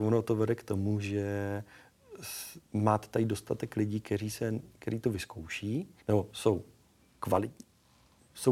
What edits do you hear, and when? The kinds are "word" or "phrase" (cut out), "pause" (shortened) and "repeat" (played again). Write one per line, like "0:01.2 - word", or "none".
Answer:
0:02.6 - pause
0:06.0 - pause